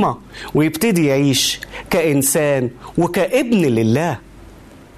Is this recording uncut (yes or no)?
yes